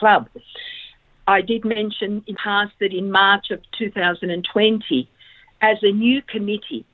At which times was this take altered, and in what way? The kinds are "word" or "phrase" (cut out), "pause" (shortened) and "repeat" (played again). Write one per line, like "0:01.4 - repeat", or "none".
0:02.3 - word